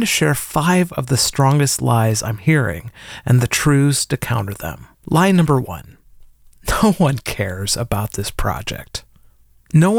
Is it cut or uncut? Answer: cut